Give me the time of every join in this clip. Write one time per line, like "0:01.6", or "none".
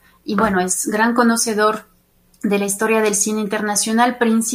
none